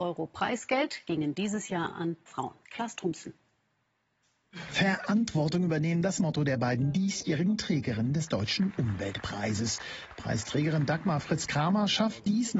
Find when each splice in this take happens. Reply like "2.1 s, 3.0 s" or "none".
2.3 s, 2.6 s, 6.2 s